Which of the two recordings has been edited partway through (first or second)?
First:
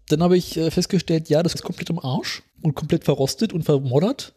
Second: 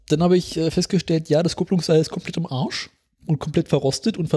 first